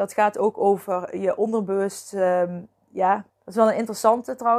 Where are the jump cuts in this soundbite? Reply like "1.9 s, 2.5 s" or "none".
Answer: 3.3 s